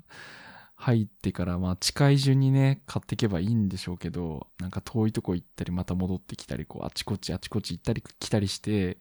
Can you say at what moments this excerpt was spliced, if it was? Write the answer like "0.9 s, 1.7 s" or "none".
4.5 s